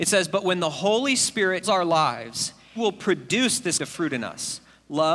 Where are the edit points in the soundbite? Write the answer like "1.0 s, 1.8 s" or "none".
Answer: 1.6 s, 2.8 s, 3.8 s